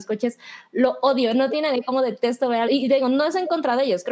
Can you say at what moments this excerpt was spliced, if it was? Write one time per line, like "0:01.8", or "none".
0:02.7